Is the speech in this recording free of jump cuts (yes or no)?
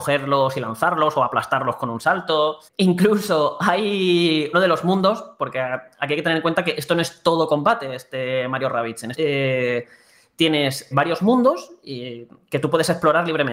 no